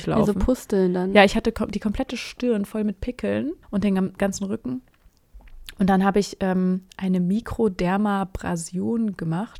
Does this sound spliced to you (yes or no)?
yes